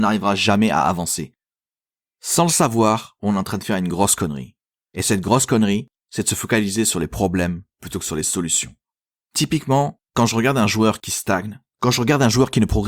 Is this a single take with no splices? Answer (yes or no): yes